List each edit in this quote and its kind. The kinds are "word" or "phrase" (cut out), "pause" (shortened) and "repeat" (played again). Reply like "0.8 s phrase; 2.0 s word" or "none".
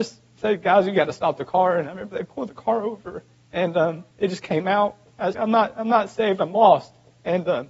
3.3 s pause; 4.1 s pause; 5.3 s word